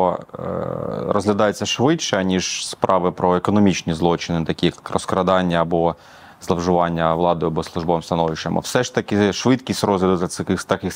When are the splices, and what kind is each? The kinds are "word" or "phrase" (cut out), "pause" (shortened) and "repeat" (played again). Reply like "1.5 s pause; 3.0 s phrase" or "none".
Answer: none

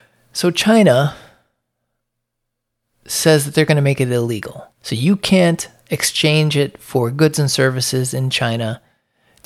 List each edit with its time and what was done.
4.7 s pause

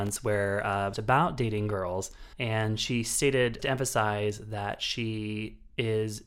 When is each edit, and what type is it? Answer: 0.9 s phrase; 2.3 s pause; 3.6 s word

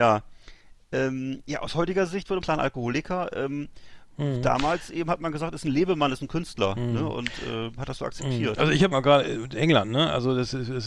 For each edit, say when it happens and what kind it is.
2.4 s phrase; 8.9 s phrase; 9.5 s word

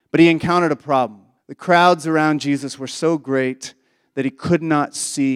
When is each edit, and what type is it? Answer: 1.4 s pause

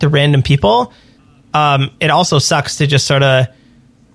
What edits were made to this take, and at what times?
none

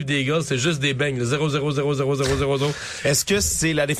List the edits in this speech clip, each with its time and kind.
none

